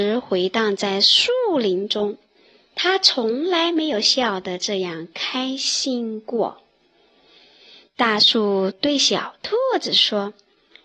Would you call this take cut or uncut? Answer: uncut